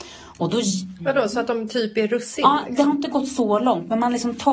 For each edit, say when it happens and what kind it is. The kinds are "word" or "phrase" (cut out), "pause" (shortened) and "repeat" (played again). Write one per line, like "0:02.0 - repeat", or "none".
none